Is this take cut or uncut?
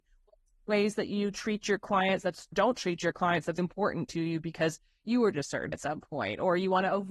cut